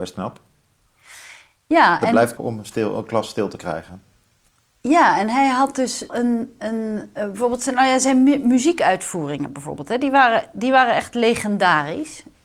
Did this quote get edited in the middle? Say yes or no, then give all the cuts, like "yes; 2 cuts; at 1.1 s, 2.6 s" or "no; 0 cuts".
yes; 2 cuts; at 2.4 s, 6.1 s